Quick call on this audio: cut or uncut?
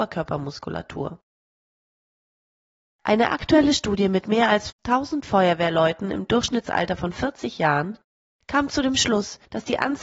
uncut